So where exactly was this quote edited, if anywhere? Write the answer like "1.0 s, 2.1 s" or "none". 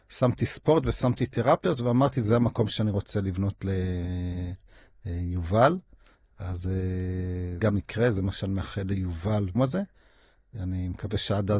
7.6 s, 9.5 s